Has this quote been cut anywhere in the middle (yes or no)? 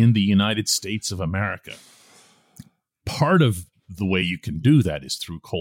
no